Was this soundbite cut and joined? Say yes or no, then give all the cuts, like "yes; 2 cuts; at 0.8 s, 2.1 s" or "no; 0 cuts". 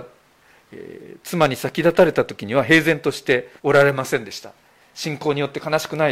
yes; 1 cut; at 3.6 s